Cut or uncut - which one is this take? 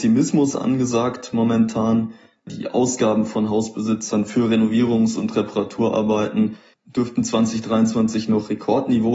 uncut